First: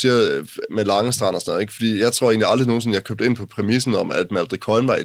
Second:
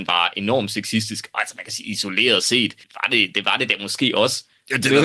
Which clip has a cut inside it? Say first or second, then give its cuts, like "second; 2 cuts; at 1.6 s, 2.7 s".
second; 1 cut; at 2.8 s